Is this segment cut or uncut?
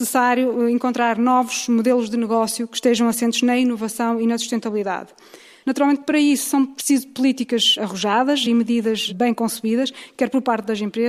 uncut